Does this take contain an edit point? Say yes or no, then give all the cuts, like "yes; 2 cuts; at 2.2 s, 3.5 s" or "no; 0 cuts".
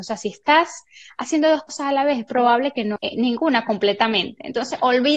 yes; 1 cut; at 3.0 s